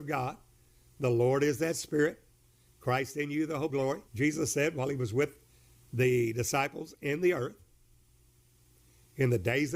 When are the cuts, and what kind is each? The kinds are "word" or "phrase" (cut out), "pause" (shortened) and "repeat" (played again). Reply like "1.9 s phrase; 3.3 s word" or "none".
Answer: 3.7 s word; 4.1 s pause